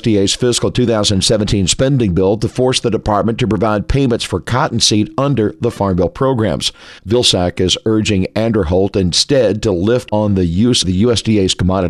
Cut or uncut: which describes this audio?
cut